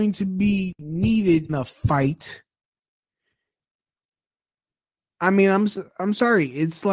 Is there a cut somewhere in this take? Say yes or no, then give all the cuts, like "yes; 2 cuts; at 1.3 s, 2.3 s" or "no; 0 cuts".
yes; 1 cut; at 1.5 s